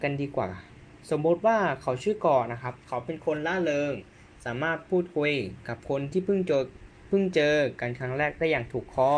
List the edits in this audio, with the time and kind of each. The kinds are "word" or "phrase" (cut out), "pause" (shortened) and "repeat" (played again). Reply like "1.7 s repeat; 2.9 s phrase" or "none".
none